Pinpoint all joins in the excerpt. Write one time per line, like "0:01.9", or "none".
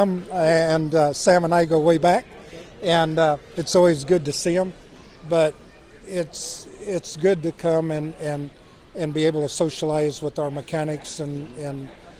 none